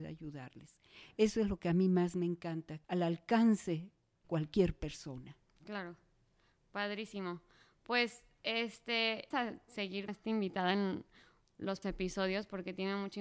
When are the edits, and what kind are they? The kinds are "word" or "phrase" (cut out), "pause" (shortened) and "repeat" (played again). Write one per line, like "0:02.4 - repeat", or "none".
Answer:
0:02.8 - word
0:04.2 - word
0:09.3 - word
0:10.1 - word
0:11.8 - word